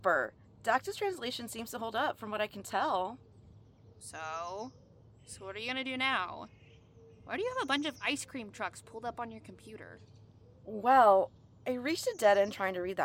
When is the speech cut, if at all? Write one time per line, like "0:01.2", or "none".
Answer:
none